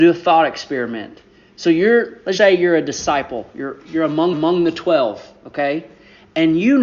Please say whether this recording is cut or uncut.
cut